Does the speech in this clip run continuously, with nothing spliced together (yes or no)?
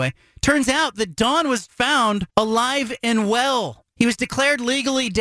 no